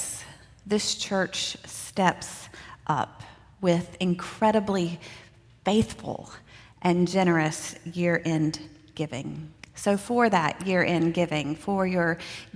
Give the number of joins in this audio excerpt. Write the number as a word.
zero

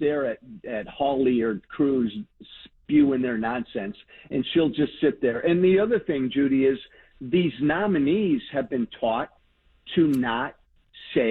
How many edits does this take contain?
zero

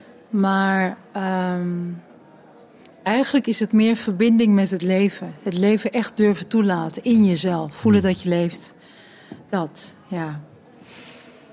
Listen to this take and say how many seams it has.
zero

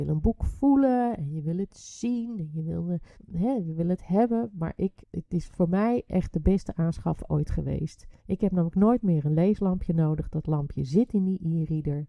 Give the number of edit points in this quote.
three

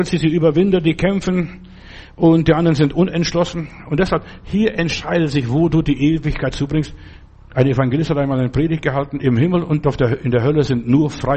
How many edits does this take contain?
one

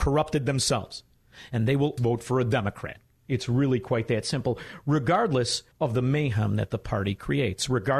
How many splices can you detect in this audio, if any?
two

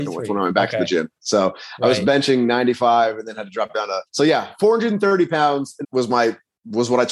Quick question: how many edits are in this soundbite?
one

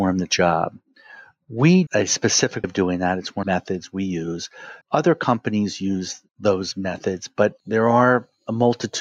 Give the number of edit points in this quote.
six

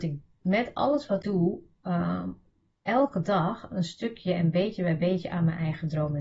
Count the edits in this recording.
one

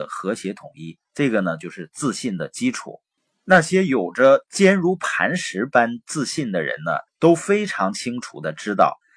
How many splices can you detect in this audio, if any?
two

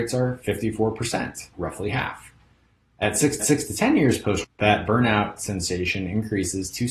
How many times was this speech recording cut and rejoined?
three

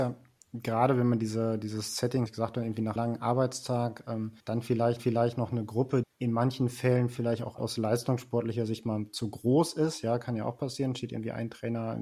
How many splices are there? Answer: six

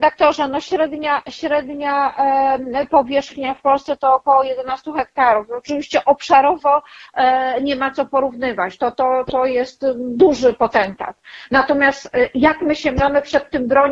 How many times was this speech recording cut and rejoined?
zero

